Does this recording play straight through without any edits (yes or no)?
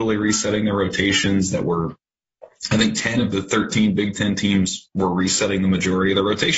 yes